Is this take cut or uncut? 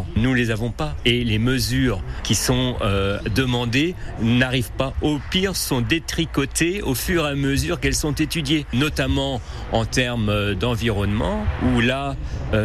uncut